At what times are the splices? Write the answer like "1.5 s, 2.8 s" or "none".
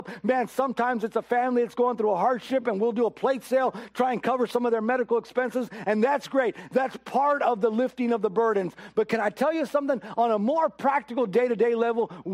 none